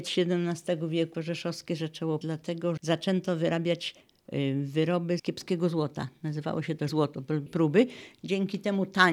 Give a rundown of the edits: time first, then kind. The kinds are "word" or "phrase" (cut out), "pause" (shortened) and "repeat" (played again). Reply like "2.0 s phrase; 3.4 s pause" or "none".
1.1 s word; 2.2 s word; 2.8 s word; 5.2 s word; 6.9 s word; 7.5 s phrase